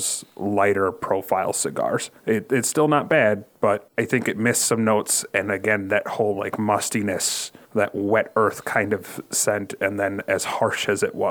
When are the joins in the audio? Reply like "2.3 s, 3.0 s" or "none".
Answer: none